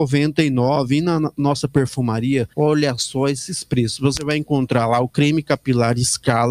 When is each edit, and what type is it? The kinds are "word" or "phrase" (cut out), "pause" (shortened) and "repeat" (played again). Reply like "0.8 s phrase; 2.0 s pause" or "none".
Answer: 2.5 s pause